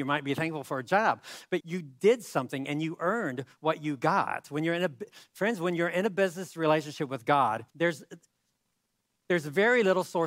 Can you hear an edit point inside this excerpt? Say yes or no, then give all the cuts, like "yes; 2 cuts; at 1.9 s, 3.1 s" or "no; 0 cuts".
yes; 2 cuts; at 1.6 s, 7.7 s